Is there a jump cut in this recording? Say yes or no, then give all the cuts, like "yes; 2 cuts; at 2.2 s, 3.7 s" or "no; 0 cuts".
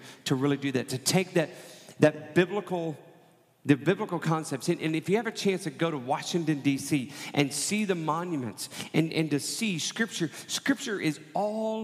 no; 0 cuts